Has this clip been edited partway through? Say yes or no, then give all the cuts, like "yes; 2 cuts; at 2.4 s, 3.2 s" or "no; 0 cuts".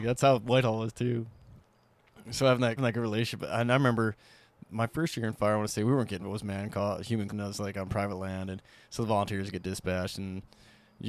yes; 4 cuts; at 2.8 s, 4.6 s, 6.2 s, 7.3 s